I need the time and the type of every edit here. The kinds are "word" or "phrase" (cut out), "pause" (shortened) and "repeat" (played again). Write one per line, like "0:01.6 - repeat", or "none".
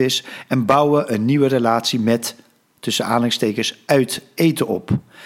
none